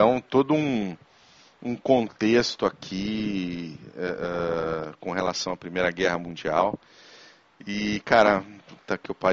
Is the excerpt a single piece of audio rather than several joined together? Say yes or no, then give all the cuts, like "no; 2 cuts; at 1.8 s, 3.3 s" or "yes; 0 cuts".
yes; 0 cuts